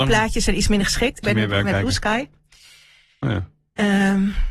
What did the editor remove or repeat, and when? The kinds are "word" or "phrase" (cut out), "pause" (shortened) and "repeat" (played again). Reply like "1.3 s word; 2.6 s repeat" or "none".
1.2 s word; 1.6 s word